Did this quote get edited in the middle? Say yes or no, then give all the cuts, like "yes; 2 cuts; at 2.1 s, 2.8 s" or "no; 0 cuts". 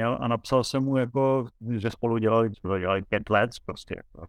yes; 2 cuts; at 1.9 s, 2.5 s